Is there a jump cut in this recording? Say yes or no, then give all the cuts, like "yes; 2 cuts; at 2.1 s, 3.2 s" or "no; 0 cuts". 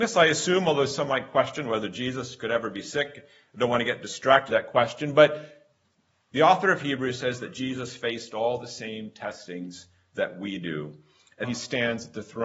yes; 2 cuts; at 4.5 s, 11.4 s